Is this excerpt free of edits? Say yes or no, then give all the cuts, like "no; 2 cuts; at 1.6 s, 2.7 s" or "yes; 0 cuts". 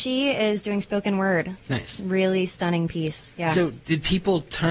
yes; 0 cuts